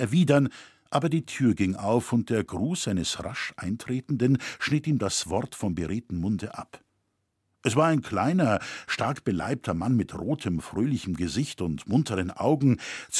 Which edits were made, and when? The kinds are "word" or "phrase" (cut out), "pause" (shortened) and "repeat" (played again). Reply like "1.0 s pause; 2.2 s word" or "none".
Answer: none

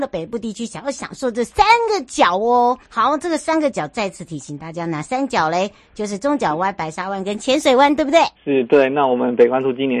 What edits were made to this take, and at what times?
2.8 s pause; 8.4 s pause

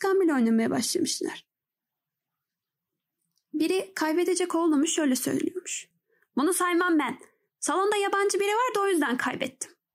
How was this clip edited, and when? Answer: none

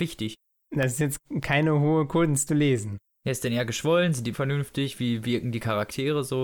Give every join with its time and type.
2.5 s word; 4.3 s word

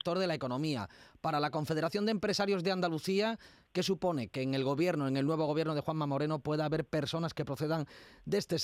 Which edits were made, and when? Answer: none

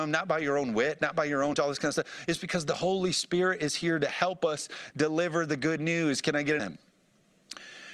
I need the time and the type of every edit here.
1.5 s word; 6.6 s word

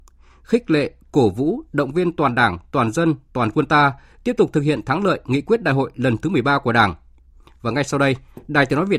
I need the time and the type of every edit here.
none

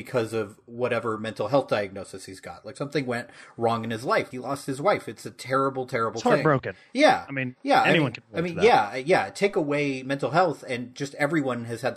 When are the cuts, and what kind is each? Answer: 4.3 s word

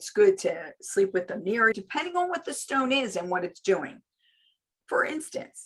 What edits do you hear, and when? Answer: 1.7 s word

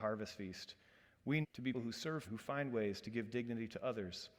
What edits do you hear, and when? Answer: 1.4 s word; 1.7 s word; 2.2 s word

